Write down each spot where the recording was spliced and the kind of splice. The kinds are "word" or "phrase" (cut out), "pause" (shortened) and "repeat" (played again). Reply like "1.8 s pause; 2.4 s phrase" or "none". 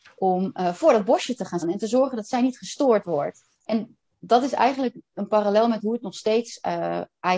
1.6 s word; 3.5 s pause